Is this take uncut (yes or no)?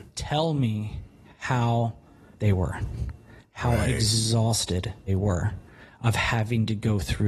no